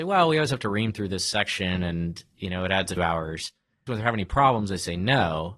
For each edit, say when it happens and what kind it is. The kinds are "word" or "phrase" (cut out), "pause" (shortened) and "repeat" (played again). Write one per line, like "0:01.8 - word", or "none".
0:03.0 - word
0:03.9 - phrase